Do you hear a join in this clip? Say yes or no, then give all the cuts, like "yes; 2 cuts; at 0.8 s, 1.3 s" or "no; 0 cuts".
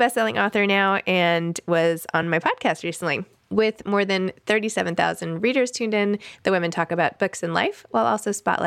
no; 0 cuts